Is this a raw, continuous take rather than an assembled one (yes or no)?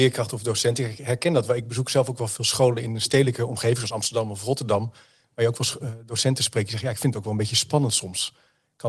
yes